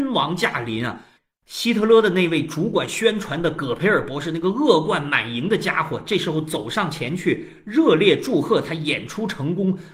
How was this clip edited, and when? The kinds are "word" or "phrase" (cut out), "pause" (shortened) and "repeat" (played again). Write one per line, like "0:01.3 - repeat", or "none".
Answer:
none